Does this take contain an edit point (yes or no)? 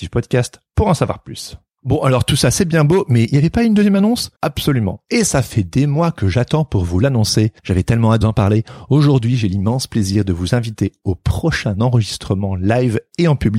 yes